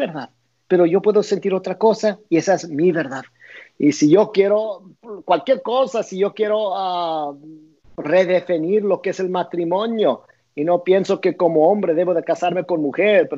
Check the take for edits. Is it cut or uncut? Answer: uncut